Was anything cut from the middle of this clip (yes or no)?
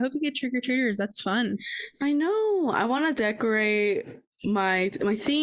no